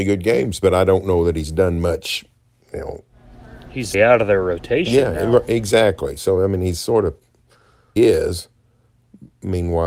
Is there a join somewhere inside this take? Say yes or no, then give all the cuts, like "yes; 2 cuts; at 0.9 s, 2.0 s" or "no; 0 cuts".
yes; 2 cuts; at 3.9 s, 8.0 s